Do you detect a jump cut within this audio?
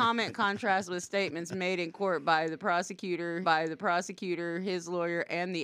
yes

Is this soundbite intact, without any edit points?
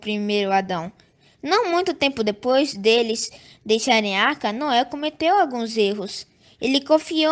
yes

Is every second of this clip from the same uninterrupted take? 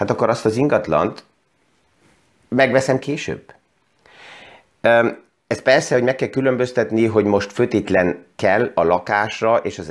yes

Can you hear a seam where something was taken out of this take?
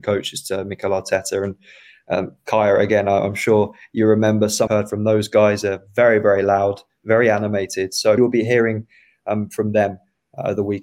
yes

